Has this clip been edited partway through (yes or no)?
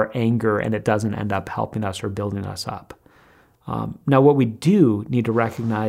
no